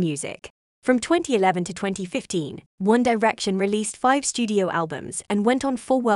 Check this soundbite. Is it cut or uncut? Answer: cut